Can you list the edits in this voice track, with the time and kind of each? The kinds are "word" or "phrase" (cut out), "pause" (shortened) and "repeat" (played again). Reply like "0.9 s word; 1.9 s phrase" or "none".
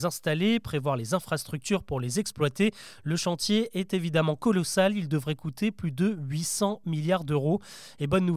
none